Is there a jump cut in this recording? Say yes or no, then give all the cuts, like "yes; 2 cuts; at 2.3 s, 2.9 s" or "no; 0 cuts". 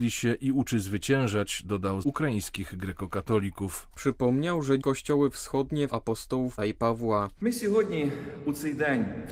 yes; 4 cuts; at 2.0 s, 4.8 s, 5.9 s, 6.6 s